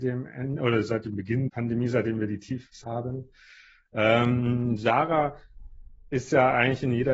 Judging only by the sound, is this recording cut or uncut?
cut